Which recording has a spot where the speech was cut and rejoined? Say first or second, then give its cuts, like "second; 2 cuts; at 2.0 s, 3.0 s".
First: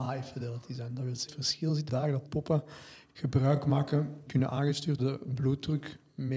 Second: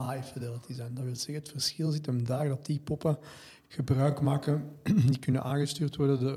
first; 5 cuts; at 1.3 s, 1.9 s, 2.3 s, 4.3 s, 5.0 s